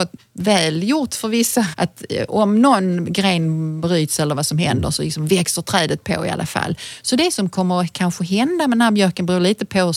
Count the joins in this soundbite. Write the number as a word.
one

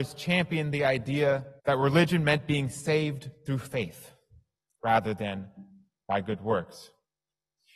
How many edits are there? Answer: one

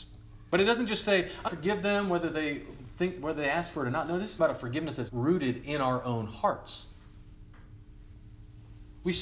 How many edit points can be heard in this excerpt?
three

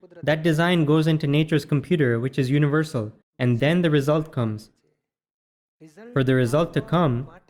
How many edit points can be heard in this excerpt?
one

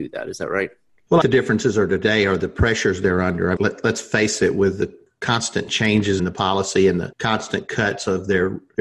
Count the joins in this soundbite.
three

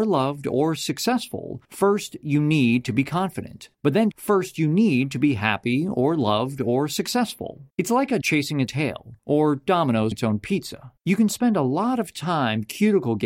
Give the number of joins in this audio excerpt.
nine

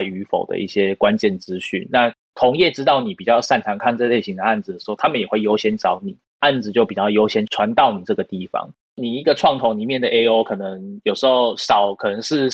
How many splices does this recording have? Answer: zero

